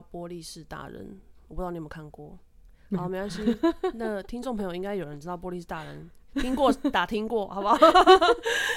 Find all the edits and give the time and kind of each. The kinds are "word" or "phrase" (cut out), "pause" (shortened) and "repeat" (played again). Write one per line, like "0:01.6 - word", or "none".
none